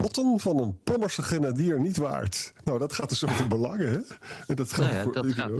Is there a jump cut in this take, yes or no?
no